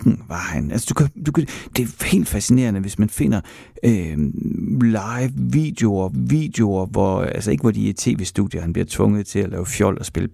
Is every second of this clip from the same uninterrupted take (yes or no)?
no